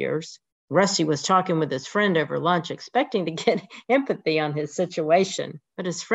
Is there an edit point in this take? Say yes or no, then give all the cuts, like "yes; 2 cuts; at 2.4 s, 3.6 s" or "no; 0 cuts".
no; 0 cuts